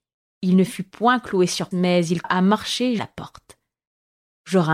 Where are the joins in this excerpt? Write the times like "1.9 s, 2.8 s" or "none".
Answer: 1.7 s, 2.2 s, 3.0 s